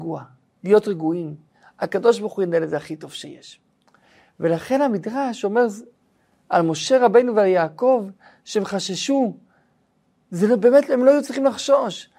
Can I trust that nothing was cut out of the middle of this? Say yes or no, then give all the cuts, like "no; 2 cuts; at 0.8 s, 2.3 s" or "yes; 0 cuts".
yes; 0 cuts